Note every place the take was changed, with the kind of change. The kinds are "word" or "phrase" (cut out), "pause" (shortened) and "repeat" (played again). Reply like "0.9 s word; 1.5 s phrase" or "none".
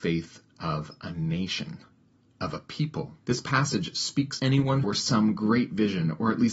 3.2 s pause; 4.4 s word; 4.8 s phrase

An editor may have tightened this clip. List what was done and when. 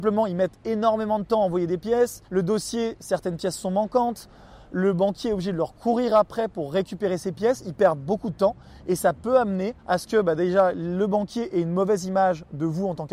2.3 s pause; 9.8 s pause

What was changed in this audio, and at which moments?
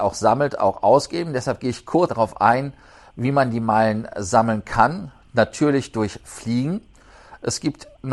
2.1 s word

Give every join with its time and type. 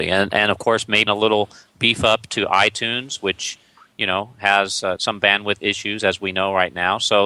1.1 s word; 5.0 s word

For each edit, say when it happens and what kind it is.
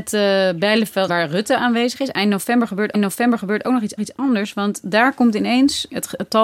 1.1 s word; 2.9 s repeat; 4.0 s repeat

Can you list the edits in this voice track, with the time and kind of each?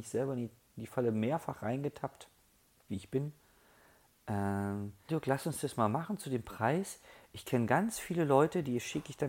2.9 s word; 5.1 s word

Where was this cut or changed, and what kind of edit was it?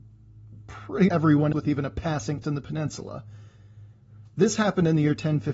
1.1 s word; 1.5 s word; 2.4 s word

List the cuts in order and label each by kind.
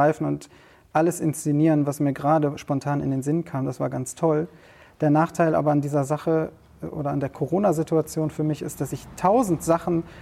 none

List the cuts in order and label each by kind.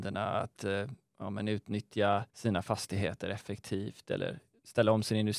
2.3 s pause

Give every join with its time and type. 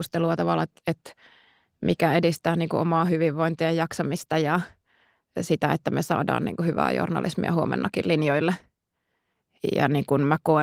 none

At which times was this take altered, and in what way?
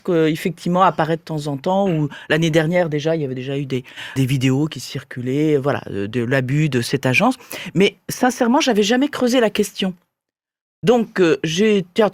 4.2 s word

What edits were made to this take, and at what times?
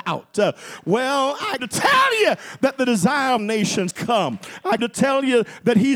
1.6 s word; 3.4 s word; 3.9 s word; 4.8 s word

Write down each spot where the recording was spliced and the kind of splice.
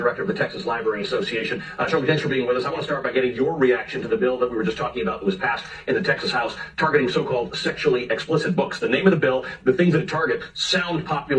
none

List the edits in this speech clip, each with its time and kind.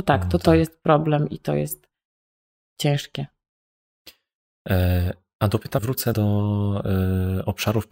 5.8 s word; 6.1 s word

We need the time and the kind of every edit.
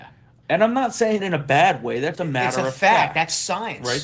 1.2 s word; 2.1 s word

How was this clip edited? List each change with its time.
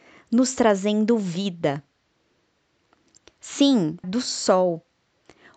4.0 s phrase

